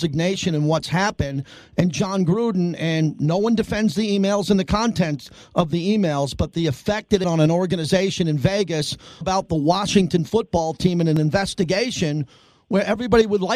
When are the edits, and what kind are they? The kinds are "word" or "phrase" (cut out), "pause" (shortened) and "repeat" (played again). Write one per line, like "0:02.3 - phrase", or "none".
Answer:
0:07.2 - word
0:09.2 - phrase

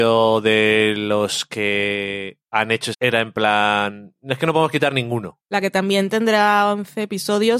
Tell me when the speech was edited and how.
0:02.9 - phrase

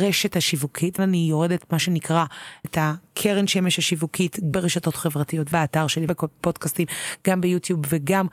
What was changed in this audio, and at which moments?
0:01.0 - word
0:02.6 - word
0:04.5 - word
0:05.5 - word
0:06.1 - word

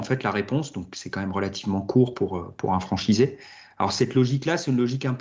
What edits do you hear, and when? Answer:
none

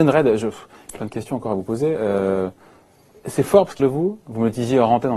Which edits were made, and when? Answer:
0:01.0 - word
0:03.8 - word

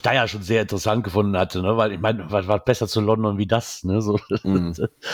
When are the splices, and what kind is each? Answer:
0:02.6 - word

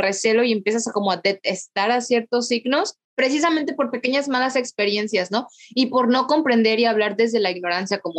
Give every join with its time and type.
0:03.0 - pause

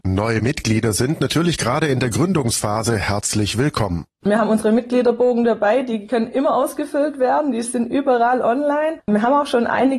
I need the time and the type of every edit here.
none

